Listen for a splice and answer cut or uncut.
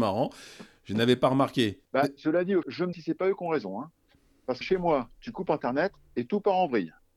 cut